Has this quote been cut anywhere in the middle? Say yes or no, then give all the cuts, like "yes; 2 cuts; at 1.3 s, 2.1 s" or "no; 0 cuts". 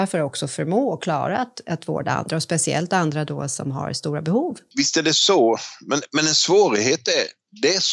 no; 0 cuts